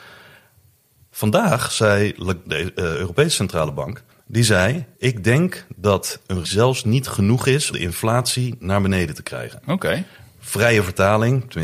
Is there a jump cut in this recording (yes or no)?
yes